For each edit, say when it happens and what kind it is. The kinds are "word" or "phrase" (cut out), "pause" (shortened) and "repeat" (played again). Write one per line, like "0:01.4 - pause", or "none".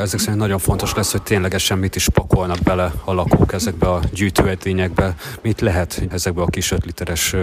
0:06.1 - word

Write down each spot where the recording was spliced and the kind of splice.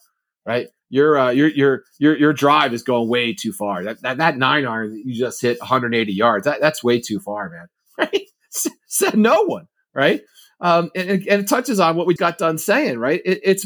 0:12.2 - word

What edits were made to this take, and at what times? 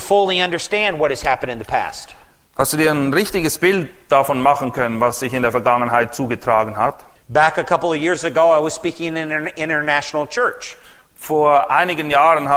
none

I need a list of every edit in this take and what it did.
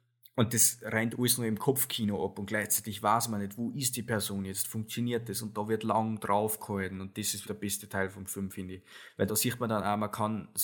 0:07.4 - word
0:09.3 - phrase

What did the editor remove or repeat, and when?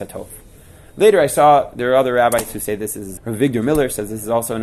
0:03.2 - word

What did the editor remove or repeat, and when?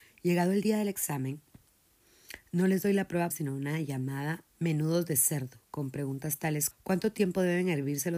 0:03.3 - word
0:04.5 - pause
0:06.7 - word

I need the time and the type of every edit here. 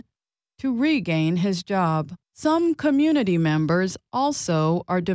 0:02.2 - pause

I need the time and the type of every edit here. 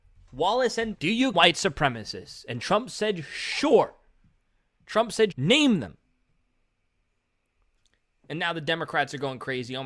0:00.9 - word
0:01.3 - word
0:05.3 - word

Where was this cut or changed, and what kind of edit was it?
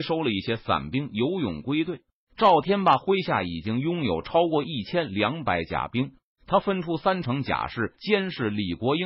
none

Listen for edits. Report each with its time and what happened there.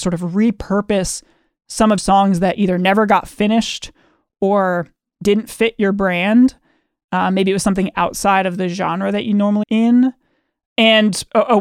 0:02.0 - word
0:09.6 - word

